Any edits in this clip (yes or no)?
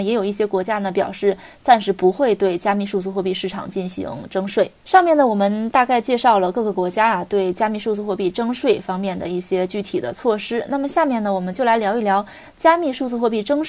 yes